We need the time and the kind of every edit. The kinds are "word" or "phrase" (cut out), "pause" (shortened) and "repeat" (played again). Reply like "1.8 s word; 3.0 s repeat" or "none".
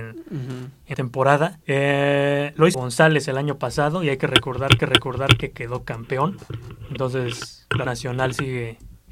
0.9 s word; 1.6 s pause; 2.7 s word; 4.8 s repeat; 7.9 s word